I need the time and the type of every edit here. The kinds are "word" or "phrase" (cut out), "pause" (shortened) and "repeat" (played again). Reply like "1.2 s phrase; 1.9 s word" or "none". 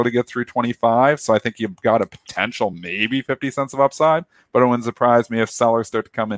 none